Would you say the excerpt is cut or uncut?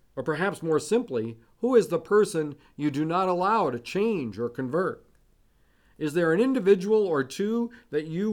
uncut